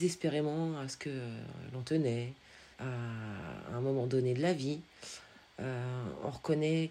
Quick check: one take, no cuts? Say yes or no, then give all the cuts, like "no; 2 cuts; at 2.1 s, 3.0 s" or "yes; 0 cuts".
no; 1 cut; at 2.7 s